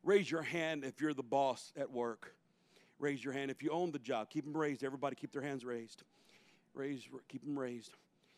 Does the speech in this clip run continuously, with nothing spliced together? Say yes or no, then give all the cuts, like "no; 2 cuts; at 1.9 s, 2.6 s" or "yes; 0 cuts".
yes; 0 cuts